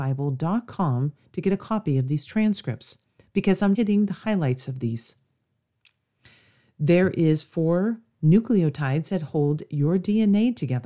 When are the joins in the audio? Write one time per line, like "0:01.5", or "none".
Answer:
0:03.2
0:03.7